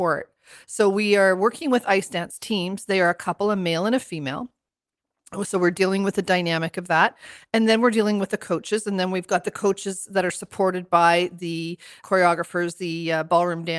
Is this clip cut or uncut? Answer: uncut